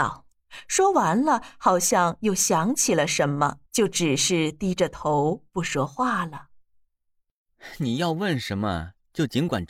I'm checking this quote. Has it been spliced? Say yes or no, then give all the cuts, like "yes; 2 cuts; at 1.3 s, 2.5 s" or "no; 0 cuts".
yes; 1 cut; at 3.7 s